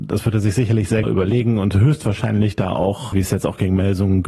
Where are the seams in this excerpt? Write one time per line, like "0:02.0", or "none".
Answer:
0:01.0
0:03.1